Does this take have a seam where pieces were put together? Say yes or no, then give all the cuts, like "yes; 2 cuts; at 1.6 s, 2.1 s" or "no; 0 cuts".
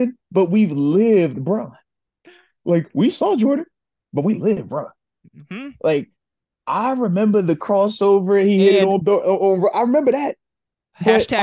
no; 0 cuts